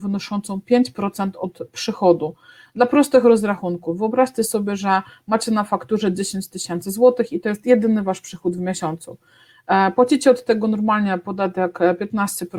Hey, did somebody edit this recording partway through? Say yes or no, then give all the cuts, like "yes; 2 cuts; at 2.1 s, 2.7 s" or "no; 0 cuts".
no; 0 cuts